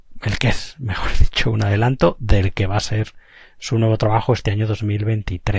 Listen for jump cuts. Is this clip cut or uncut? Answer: uncut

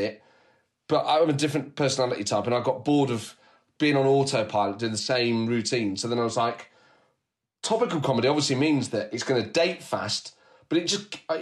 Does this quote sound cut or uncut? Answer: uncut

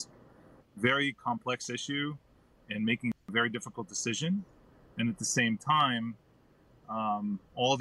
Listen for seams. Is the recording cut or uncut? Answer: uncut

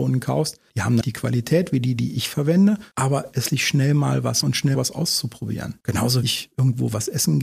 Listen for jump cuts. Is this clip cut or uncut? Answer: cut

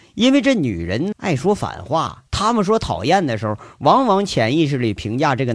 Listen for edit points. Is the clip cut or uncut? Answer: cut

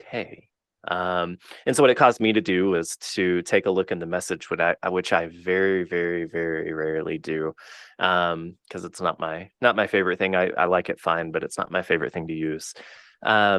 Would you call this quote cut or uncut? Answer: uncut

